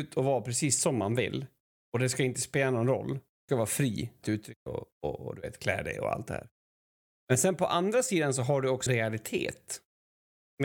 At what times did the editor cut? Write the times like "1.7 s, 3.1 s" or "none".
3.5 s, 4.2 s, 4.7 s, 8.9 s